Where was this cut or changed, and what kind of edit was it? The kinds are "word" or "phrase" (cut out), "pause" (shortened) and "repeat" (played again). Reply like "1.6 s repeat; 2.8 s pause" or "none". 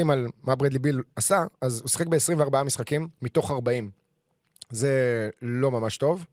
1.1 s pause; 3.1 s pause

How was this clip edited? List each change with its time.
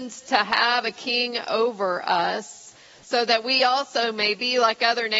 none

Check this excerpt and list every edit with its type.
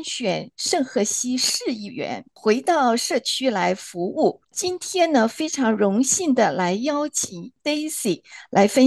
none

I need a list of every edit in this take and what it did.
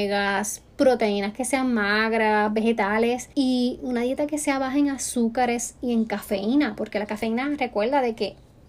3.3 s pause

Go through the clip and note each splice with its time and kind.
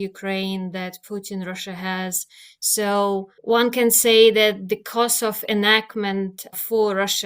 3.4 s pause

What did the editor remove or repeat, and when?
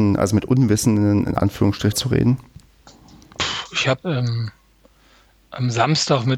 1.9 s word; 4.0 s word

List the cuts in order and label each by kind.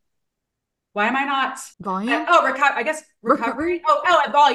1.7 s pause

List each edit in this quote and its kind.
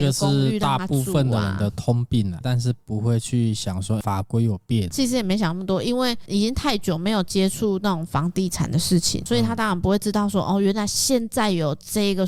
2.4 s phrase

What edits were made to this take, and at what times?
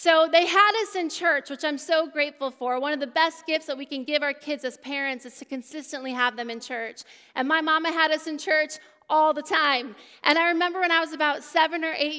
none

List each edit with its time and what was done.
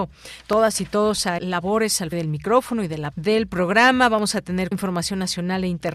1.4 s word; 2.1 s word; 3.1 s word; 4.7 s word

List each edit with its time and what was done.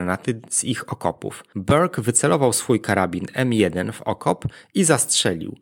none

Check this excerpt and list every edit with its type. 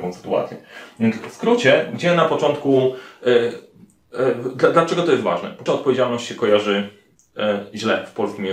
5.7 s word

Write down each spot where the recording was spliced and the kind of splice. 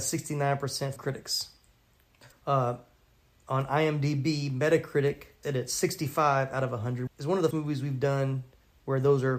1.0 s word; 2.3 s word; 5.4 s word; 7.1 s word; 7.5 s word

